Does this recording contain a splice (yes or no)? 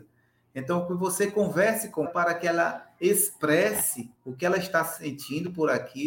yes